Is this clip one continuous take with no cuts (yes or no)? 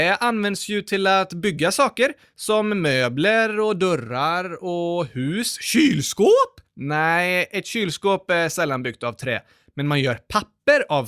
yes